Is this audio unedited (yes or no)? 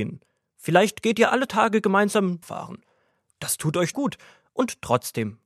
no